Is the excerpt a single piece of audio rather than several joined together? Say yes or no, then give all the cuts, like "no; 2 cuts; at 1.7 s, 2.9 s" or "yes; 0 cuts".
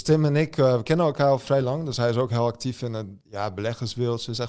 yes; 0 cuts